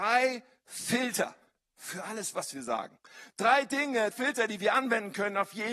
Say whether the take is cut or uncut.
cut